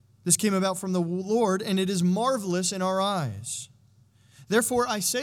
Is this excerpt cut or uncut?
uncut